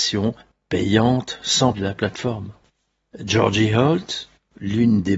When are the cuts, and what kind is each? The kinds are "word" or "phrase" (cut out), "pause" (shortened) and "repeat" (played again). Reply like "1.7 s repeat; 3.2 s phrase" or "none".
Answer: 1.7 s word